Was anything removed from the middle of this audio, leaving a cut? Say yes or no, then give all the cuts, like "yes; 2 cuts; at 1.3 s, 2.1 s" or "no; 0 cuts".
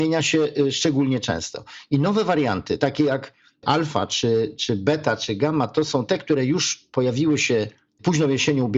no; 0 cuts